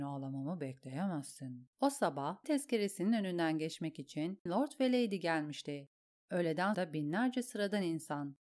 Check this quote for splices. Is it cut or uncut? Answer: cut